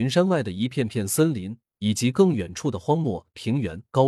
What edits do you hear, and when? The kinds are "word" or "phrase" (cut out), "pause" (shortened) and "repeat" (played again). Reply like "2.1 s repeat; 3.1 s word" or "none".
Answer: 1.7 s pause